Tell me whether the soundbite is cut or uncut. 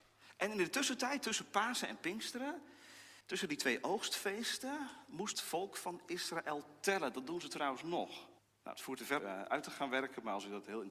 cut